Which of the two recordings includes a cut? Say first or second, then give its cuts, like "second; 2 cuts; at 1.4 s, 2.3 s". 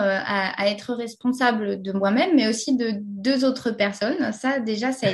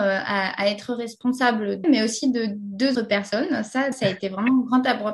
second; 3 cuts; at 1.8 s, 2.9 s, 3.9 s